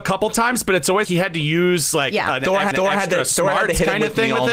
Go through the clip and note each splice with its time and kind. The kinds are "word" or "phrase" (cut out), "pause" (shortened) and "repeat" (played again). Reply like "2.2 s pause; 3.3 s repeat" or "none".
1.0 s word; 2.7 s repeat